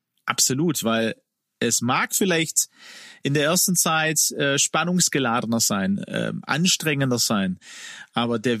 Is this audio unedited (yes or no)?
yes